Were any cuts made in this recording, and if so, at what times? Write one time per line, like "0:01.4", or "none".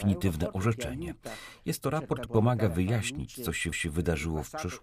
0:02.3
0:03.7